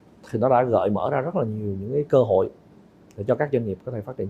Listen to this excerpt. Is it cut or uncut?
uncut